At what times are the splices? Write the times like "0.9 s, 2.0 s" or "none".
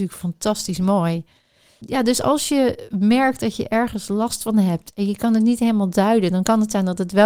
none